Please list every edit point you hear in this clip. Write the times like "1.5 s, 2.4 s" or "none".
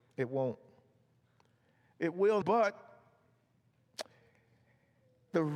2.4 s